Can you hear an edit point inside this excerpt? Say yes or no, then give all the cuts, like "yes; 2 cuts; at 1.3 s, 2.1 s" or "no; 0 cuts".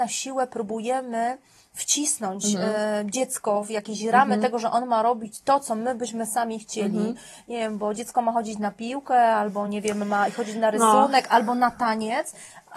no; 0 cuts